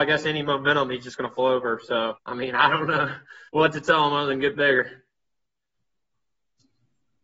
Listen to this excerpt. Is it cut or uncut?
cut